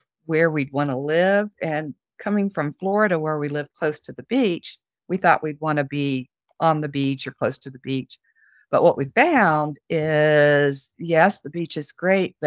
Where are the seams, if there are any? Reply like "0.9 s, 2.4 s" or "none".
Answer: none